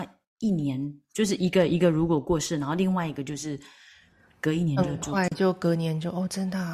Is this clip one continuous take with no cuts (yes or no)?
yes